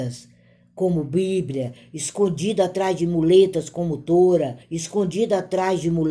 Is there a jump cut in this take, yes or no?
yes